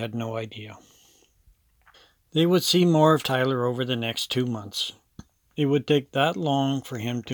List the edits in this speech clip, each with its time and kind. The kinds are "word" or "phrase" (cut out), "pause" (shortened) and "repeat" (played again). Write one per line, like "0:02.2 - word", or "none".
none